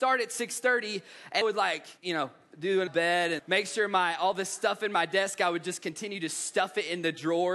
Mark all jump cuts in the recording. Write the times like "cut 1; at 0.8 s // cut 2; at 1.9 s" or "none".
cut 1; at 1.4 s // cut 2; at 2.0 s // cut 3; at 2.9 s // cut 4; at 3.4 s